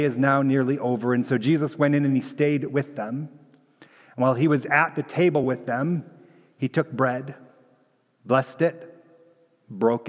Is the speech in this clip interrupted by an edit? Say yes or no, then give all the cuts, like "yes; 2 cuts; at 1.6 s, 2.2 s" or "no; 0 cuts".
no; 0 cuts